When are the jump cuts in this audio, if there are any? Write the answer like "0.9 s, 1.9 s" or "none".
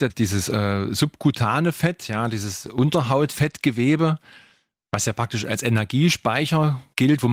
none

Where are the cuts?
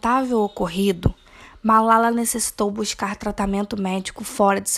none

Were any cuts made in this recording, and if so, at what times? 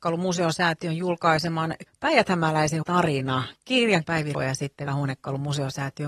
1.9 s, 2.8 s, 4.0 s, 4.3 s, 4.9 s

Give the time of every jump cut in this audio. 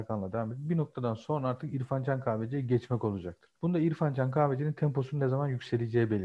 none

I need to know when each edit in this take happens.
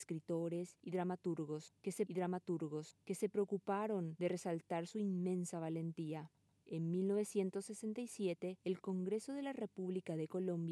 2.1 s

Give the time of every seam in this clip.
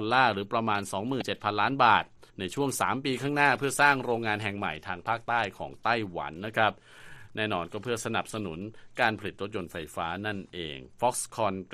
2.3 s

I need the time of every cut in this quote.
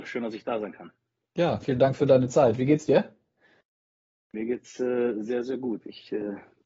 none

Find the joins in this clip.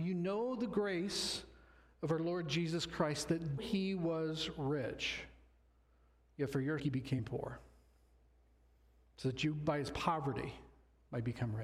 3.6 s, 6.8 s

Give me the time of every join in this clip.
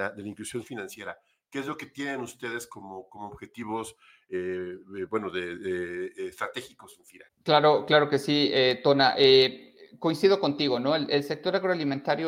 none

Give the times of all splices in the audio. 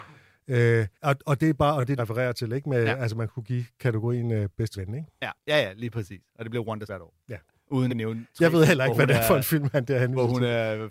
0.9 s, 2.0 s, 4.7 s, 5.4 s, 6.9 s, 7.2 s, 7.9 s

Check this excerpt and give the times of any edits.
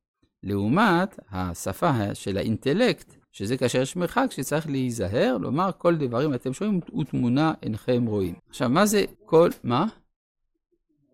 3.2 s, 8.4 s, 9.1 s

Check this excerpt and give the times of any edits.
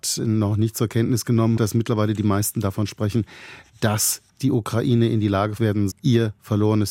1.6 s, 5.6 s, 5.9 s

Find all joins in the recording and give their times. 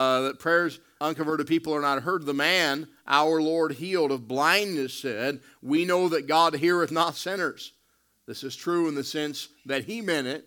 1.0 s

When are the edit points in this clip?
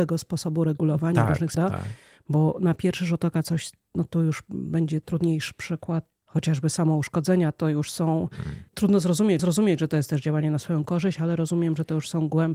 1.5 s, 5.0 s, 9.4 s

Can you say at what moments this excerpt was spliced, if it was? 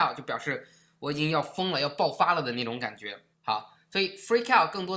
3.3 s

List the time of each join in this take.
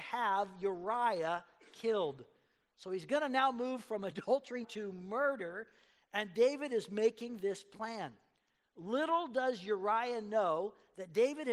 4.6 s

